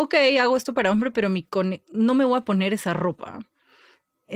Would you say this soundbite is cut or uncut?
uncut